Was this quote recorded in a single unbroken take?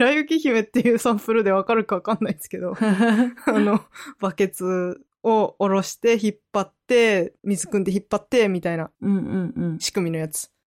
no; 2 cuts; at 7.4 s, 8.9 s

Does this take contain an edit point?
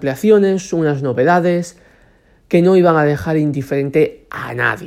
no; 0 cuts

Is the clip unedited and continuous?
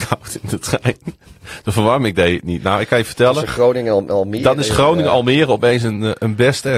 yes; 0 cuts

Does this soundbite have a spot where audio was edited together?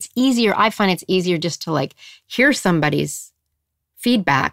no; 0 cuts

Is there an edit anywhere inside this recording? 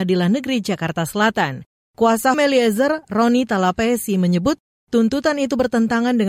yes; 1 cut; at 2.3 s

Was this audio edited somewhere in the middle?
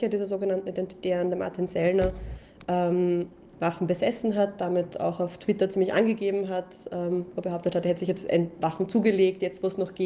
no; 0 cuts

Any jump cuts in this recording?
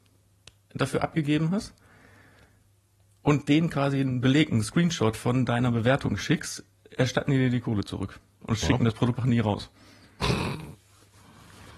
yes; 1 cut; at 9.2 s

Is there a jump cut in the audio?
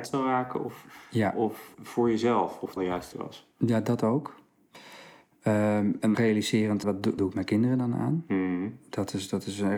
yes; 6 cuts; at 1.7 s, 2.8 s, 3.1 s, 6.1 s, 6.8 s, 7.2 s

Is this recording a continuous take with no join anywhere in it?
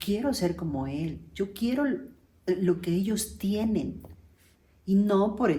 yes; 0 cuts

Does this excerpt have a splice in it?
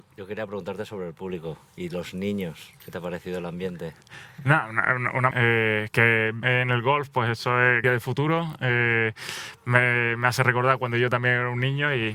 yes; 4 cuts; at 2.8 s, 5.3 s, 6.4 s, 7.8 s

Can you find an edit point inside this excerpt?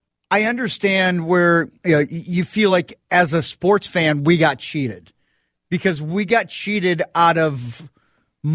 no; 0 cuts

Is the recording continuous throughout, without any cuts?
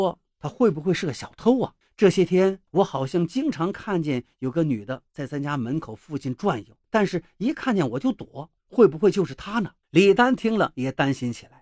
no; 5 cuts; at 1.8 s, 2.7 s, 6.8 s, 8.6 s, 9.8 s

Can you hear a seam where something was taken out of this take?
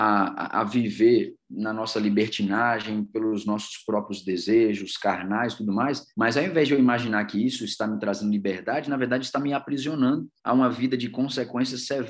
yes; 2 cuts; at 6.1 s, 10.4 s

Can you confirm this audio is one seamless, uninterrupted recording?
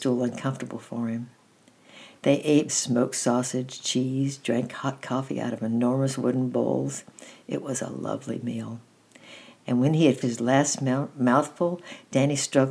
no; 2 cuts; at 2.7 s, 10.2 s

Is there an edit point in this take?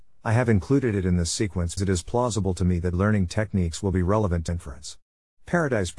yes; 3 cuts; at 1.8 s, 2.9 s, 4.5 s

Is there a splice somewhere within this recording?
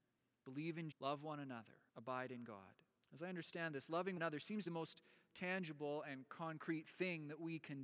yes; 5 cuts; at 0.9 s, 1.9 s, 3.0 s, 4.2 s, 4.7 s

